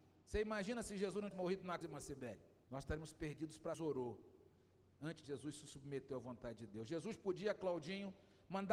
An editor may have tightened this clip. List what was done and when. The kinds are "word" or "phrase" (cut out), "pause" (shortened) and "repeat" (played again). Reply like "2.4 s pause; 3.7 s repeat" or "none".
1.3 s word; 1.8 s word; 2.6 s pause; 3.7 s phrase; 5.2 s phrase